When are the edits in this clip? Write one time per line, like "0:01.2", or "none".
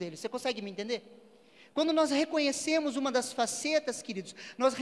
none